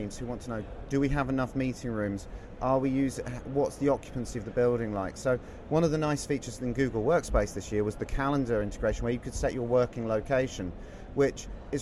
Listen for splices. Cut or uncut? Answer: uncut